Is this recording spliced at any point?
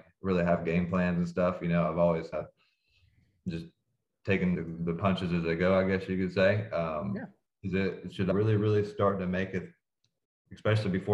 yes; 3 cuts; at 2.3 s, 4.5 s, 8.3 s

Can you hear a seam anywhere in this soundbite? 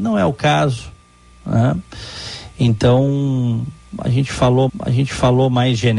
yes; 1 cut; at 4.7 s

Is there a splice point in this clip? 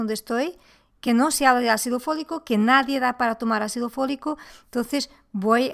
no; 0 cuts

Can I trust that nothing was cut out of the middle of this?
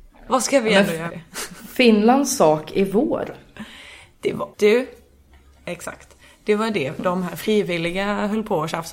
no; 2 cuts; at 1.1 s, 4.5 s

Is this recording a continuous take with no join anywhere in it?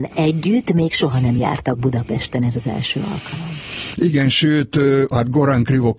yes; 0 cuts

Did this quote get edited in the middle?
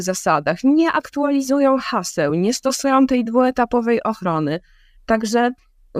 no; 0 cuts

